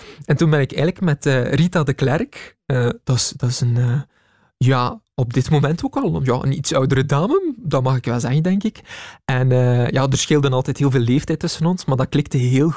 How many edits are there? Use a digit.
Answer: 0